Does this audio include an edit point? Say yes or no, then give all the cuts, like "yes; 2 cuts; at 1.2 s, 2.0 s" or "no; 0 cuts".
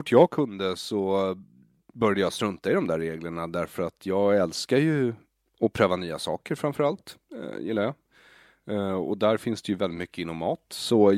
no; 0 cuts